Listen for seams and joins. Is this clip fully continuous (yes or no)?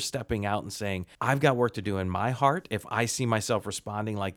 no